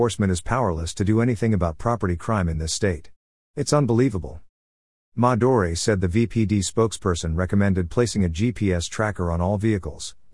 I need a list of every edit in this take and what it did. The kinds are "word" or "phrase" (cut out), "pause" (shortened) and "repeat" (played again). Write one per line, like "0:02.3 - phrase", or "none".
none